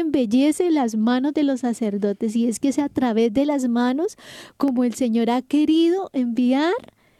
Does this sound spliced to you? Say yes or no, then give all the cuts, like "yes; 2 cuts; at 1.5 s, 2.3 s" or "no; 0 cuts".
no; 0 cuts